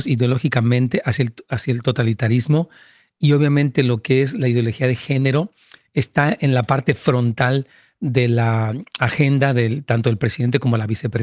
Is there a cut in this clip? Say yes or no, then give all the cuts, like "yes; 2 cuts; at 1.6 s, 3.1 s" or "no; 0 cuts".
no; 0 cuts